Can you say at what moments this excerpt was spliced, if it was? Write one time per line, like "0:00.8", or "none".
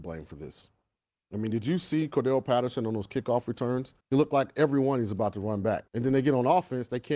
0:04.0
0:05.9